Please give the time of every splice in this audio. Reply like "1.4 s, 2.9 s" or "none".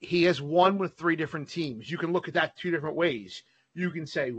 none